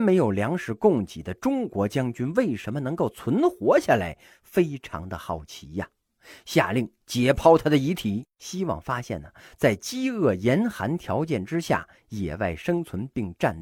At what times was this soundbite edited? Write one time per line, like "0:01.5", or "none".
0:08.3